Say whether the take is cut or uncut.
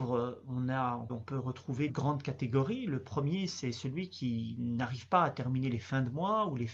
cut